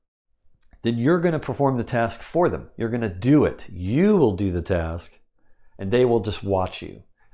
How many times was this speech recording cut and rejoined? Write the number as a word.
zero